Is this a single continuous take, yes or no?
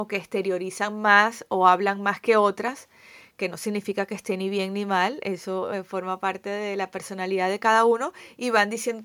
yes